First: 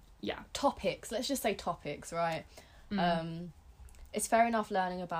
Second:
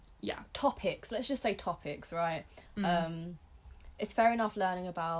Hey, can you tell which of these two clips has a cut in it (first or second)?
second